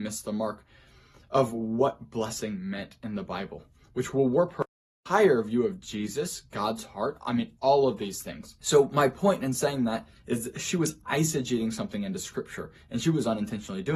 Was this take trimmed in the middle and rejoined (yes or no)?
no